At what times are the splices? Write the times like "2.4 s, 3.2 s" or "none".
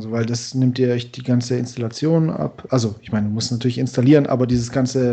none